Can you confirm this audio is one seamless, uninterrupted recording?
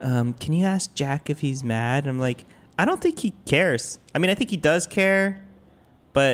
yes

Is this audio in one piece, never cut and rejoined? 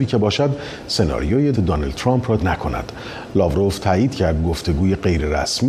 no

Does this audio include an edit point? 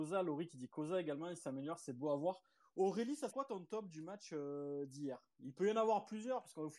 yes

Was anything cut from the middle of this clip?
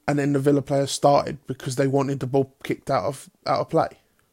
no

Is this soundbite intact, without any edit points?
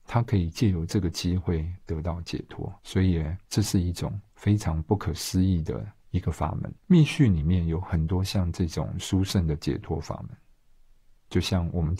no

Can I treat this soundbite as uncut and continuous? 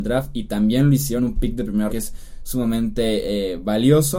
no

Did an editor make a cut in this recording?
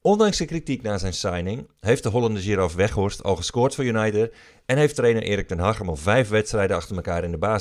no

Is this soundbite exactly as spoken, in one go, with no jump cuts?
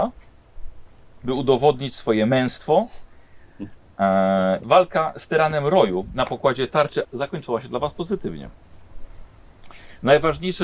no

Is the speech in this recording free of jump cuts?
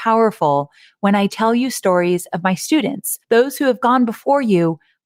no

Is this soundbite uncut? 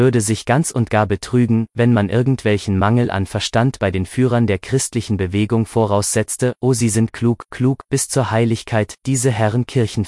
yes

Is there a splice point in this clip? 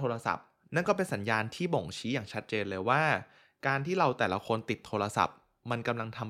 no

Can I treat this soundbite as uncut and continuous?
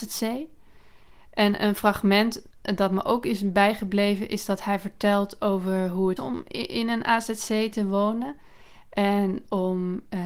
no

